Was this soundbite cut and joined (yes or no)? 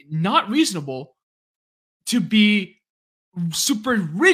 no